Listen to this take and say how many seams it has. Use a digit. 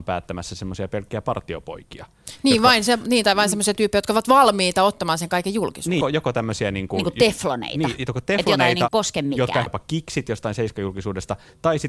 3